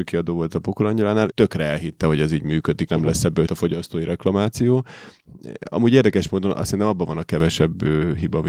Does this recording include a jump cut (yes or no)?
yes